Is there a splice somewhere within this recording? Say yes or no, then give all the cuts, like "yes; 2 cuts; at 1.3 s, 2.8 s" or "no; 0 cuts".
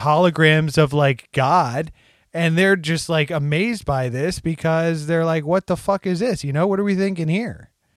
no; 0 cuts